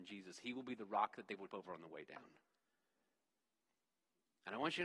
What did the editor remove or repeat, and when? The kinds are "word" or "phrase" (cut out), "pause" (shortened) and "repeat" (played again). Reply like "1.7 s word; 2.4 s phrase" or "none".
1.5 s word